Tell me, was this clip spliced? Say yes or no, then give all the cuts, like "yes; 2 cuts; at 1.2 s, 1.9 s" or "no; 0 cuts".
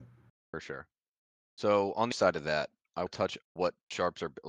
yes; 3 cuts; at 2.1 s, 3.1 s, 3.4 s